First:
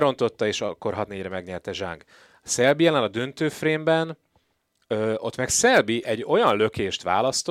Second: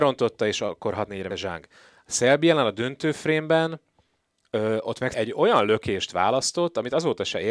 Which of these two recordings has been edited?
second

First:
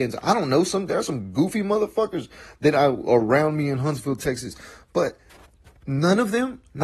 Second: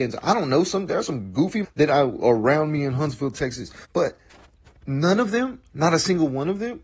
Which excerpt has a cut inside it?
second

